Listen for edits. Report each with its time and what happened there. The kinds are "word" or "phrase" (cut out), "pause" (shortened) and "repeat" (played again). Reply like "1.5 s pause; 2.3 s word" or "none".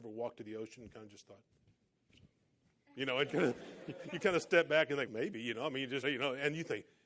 3.3 s word; 5.1 s word; 6.0 s word